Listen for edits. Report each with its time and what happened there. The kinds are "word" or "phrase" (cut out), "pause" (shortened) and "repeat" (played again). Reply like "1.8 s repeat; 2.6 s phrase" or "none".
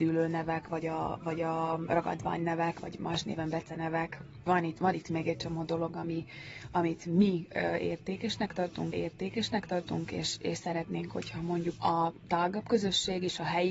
4.5 s word; 8.9 s repeat; 11.8 s word